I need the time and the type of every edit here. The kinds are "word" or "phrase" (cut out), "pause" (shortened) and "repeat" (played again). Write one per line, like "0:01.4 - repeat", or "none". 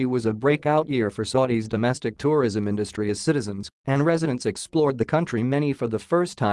none